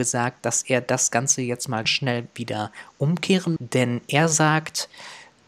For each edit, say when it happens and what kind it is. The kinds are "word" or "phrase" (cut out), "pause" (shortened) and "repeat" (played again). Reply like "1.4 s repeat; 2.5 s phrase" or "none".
1.8 s word; 3.6 s word